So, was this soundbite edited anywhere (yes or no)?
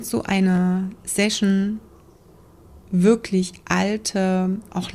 no